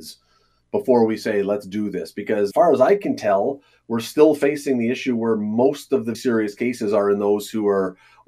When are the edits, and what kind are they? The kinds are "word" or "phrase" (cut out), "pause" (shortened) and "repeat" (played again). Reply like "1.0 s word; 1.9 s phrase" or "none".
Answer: 2.5 s word; 6.1 s word